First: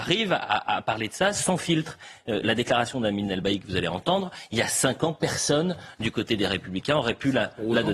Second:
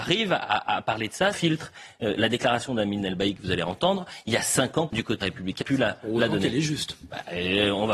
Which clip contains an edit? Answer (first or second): second